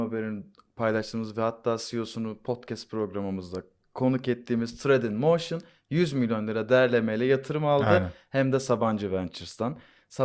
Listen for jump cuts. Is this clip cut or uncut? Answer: uncut